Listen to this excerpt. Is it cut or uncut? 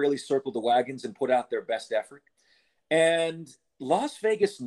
uncut